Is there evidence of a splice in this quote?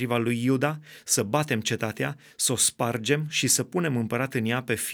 no; 0 cuts

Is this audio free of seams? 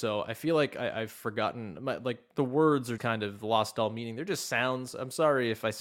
no; 1 cut; at 3.0 s

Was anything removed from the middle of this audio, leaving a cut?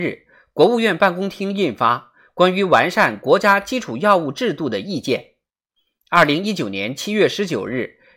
no; 0 cuts

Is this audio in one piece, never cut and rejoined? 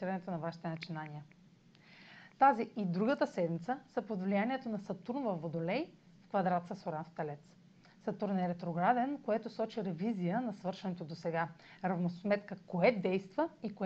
yes; 0 cuts

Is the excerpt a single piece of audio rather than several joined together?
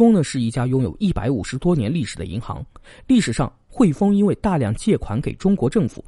yes; 0 cuts

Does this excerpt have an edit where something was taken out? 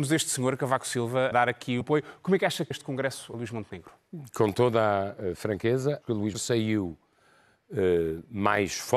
yes; 6 cuts; at 1.3 s, 1.8 s, 2.7 s, 3.3 s, 6.0 s, 6.3 s

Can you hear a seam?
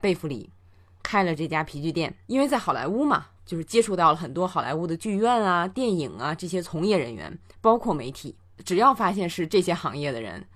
yes; 2 cuts; at 2.2 s, 3.4 s

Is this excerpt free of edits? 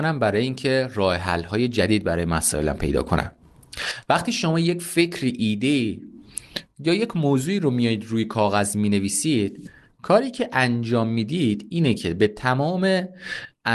yes; 0 cuts

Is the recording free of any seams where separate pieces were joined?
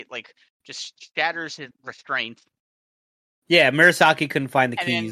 no; 1 cut; at 1.7 s

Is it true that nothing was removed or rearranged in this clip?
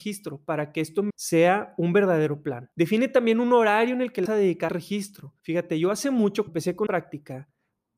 no; 7 cuts; at 1.1 s, 2.7 s, 4.3 s, 4.7 s, 5.4 s, 6.5 s, 6.9 s

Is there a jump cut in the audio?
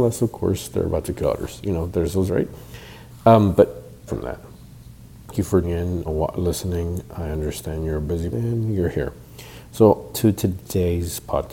yes; 9 cuts; at 1.2 s, 1.9 s, 2.3 s, 4.1 s, 5.3 s, 5.6 s, 6.1 s, 8.3 s, 10.1 s

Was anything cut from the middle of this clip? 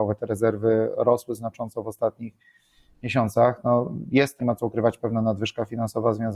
yes; 1 cut; at 4.4 s

